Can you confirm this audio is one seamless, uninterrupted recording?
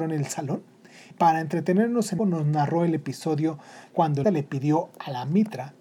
no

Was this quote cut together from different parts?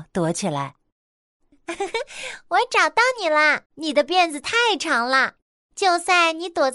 yes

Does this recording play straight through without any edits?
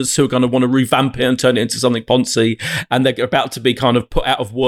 yes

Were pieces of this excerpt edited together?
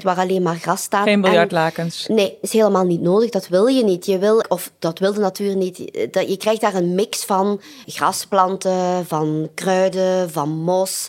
yes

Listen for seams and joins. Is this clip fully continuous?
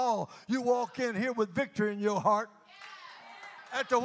yes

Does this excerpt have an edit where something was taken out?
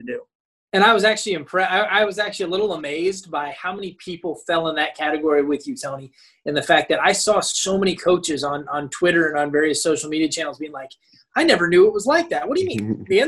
no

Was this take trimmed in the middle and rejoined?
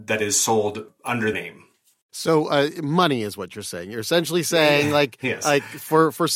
yes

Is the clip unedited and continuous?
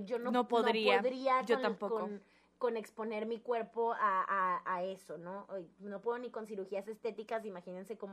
yes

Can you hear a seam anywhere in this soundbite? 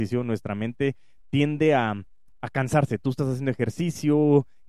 no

